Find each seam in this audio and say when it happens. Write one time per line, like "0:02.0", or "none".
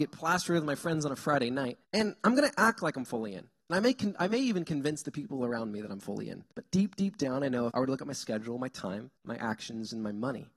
0:01.8
0:06.5
0:07.7
0:09.2